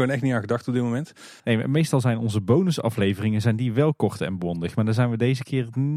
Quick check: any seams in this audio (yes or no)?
yes